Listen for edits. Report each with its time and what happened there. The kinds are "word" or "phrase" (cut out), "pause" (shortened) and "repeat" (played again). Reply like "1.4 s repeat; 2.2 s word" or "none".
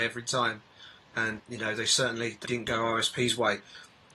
1.4 s word; 2.4 s word